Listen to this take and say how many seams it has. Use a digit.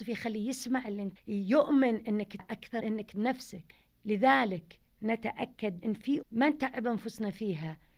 6